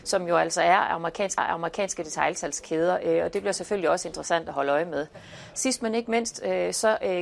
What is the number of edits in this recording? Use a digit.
1